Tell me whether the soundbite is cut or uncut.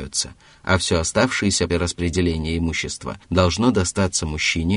cut